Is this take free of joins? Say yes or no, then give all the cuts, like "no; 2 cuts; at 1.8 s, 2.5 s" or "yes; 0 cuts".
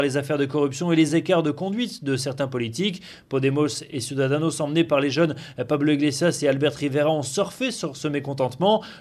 yes; 0 cuts